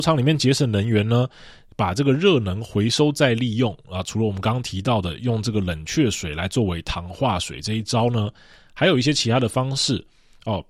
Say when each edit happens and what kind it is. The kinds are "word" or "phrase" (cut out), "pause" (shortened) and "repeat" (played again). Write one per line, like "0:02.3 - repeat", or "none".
none